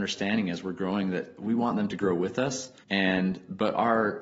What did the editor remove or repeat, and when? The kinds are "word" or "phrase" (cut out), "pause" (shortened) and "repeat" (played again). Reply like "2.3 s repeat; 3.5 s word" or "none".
2.8 s pause